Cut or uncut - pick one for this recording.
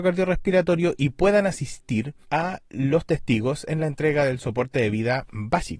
cut